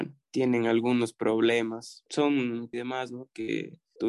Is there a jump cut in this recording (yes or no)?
yes